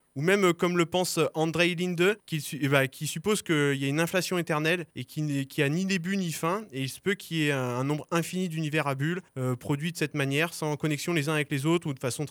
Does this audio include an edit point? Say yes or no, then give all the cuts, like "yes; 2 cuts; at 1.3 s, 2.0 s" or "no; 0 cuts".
yes; 3 cuts; at 2.2 s, 4.9 s, 9.3 s